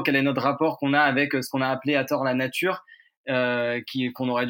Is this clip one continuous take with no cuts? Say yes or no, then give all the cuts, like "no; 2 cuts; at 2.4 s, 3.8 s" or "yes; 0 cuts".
yes; 0 cuts